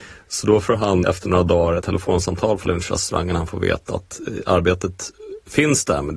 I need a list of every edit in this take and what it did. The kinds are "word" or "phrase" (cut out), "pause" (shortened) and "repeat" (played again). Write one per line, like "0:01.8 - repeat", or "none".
0:01.0 - word
0:01.8 - word
0:02.6 - word